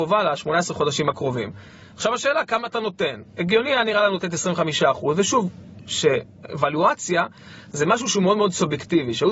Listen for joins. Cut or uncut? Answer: uncut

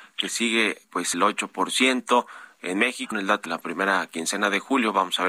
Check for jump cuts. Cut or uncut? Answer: cut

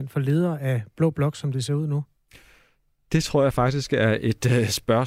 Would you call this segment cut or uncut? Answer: uncut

